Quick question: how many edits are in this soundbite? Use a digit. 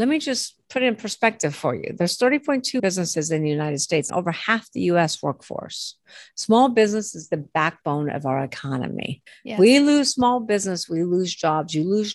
3